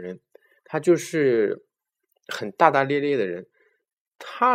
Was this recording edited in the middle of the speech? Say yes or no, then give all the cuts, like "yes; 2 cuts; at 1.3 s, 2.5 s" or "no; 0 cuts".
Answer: no; 0 cuts